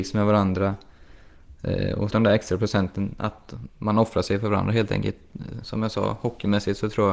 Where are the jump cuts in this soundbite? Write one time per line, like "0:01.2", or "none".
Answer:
0:02.1